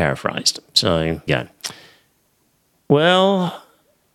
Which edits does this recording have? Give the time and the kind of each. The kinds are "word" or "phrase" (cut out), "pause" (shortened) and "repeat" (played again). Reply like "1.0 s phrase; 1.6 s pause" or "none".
1.3 s phrase

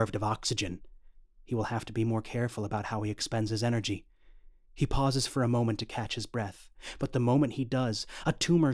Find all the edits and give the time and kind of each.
none

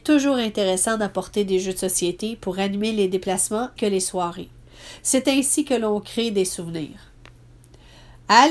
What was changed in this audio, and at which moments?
3.8 s word

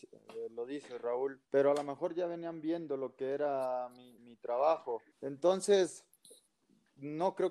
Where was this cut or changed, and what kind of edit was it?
1.4 s pause; 4.2 s word; 5.1 s pause

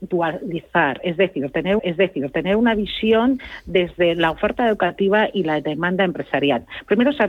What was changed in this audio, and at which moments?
1.8 s repeat

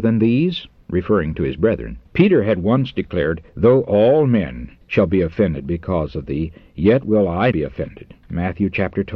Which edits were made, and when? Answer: 2.0 s pause; 3.5 s pause; 4.8 s pause; 7.5 s word

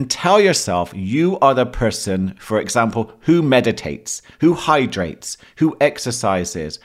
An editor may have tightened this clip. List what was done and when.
4.3 s pause

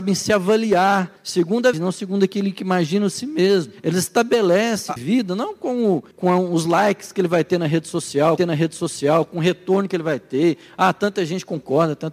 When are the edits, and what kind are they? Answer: 1.2 s pause; 1.7 s word; 5.0 s phrase; 6.1 s pause; 8.4 s repeat

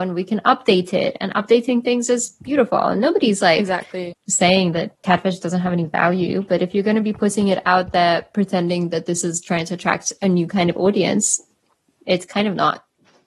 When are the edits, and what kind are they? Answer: none

